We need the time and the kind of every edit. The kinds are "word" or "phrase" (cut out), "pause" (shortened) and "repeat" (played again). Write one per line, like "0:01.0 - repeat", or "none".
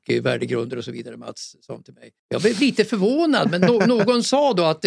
0:02.2 - pause